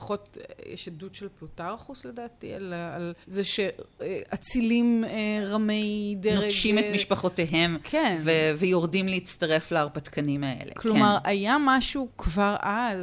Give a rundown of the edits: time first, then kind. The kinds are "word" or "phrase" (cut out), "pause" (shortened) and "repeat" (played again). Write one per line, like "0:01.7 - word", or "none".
0:03.2 - pause